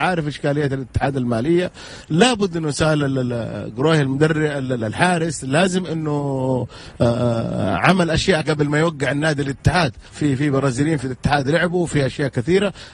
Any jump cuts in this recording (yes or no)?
yes